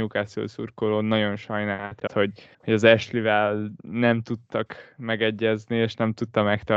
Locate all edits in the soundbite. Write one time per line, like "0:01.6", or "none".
0:02.1
0:02.5
0:03.8